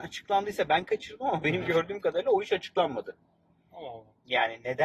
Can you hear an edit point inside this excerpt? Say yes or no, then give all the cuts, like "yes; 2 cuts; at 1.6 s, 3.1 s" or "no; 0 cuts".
no; 0 cuts